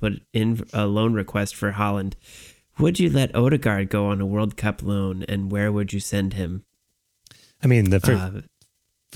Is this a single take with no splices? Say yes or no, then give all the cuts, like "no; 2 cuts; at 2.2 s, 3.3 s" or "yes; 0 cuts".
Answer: yes; 0 cuts